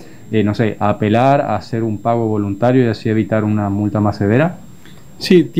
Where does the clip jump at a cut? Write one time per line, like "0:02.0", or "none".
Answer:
none